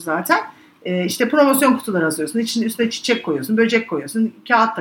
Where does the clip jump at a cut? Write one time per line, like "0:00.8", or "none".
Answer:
none